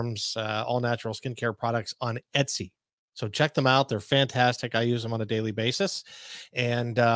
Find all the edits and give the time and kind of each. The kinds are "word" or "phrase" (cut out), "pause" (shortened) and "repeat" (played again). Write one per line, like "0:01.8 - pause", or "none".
none